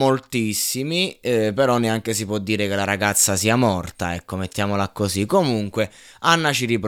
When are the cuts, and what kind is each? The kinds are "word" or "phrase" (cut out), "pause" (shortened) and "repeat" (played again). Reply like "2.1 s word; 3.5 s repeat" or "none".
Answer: none